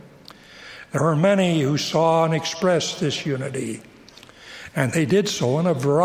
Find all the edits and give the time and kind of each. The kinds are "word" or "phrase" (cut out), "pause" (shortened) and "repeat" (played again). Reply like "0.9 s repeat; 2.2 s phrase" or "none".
none